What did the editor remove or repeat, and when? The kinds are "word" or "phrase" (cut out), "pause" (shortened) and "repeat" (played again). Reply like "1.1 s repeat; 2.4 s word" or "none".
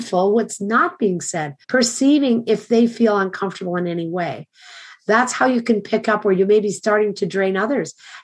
1.6 s pause